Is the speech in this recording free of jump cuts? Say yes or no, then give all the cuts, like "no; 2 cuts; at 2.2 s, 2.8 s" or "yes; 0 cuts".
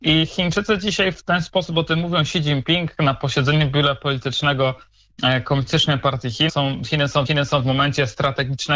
no; 2 cuts; at 6.5 s, 7.3 s